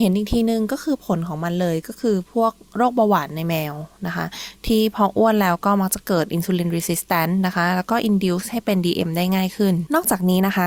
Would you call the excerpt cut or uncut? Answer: uncut